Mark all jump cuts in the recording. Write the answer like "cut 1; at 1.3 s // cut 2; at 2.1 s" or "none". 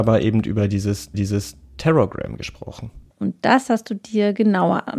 cut 1; at 1.1 s // cut 2; at 3.1 s